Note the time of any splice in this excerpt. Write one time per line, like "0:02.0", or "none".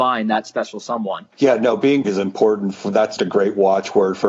0:01.3
0:02.0
0:03.2